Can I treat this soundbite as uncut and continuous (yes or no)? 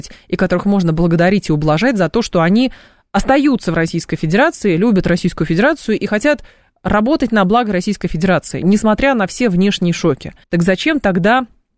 no